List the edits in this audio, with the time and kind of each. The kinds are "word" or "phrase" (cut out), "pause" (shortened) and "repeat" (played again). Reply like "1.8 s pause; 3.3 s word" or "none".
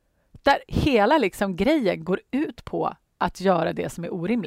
none